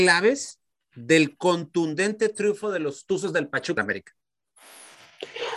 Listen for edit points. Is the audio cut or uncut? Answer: cut